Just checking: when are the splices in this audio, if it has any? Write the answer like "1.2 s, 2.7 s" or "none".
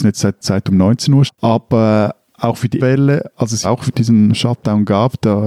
1.3 s, 2.8 s, 3.6 s